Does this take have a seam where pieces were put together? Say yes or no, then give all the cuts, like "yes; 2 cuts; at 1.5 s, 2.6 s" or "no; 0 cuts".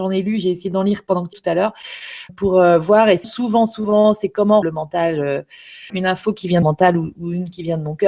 yes; 6 cuts; at 1.3 s, 2.3 s, 3.2 s, 4.6 s, 5.9 s, 6.6 s